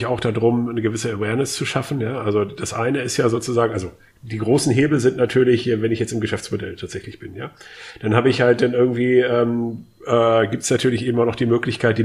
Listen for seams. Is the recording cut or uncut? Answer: uncut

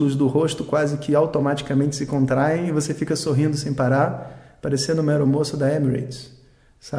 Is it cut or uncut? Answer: uncut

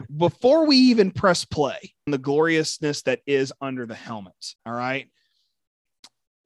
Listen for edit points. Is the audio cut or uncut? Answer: cut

